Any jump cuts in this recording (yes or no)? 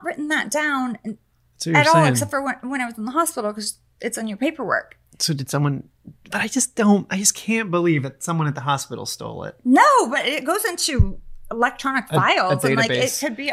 no